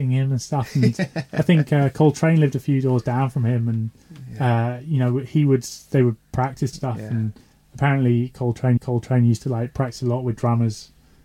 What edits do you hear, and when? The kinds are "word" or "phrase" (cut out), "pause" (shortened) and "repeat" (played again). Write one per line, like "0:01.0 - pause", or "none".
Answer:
0:06.7 - phrase
0:08.8 - repeat